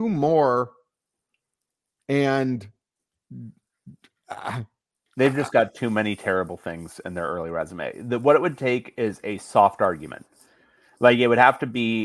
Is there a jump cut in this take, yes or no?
no